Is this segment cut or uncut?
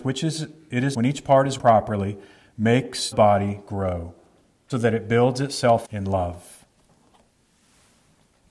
cut